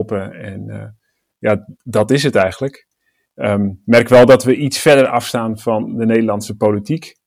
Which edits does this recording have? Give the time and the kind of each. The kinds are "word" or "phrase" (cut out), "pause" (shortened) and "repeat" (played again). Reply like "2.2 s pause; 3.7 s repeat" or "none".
none